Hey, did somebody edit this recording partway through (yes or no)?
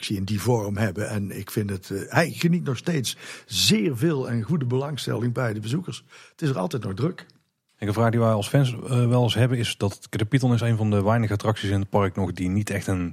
no